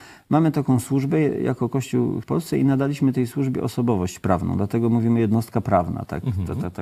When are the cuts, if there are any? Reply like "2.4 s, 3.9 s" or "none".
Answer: 2.2 s

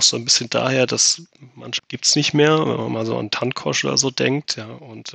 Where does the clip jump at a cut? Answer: 1.8 s

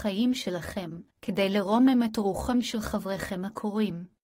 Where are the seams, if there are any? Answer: 1.1 s

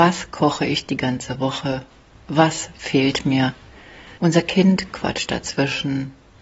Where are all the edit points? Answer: 4.2 s

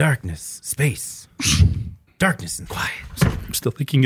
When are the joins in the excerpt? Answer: 2.1 s, 2.7 s

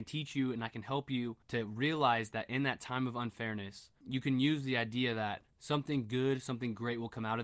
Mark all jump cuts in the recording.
1.4 s, 4.0 s, 5.5 s

